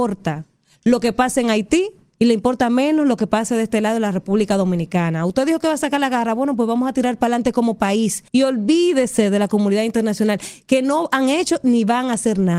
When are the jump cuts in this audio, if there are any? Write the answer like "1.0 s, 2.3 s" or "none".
8.3 s